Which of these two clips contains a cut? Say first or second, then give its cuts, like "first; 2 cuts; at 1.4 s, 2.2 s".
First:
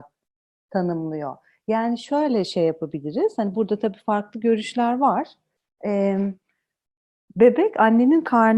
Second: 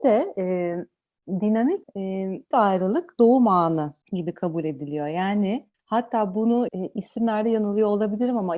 second; 5 cuts; at 1.8 s, 2.5 s, 4.0 s, 5.7 s, 6.7 s